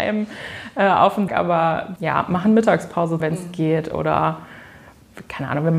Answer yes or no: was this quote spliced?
yes